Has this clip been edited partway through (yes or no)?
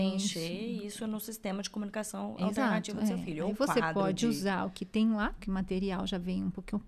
no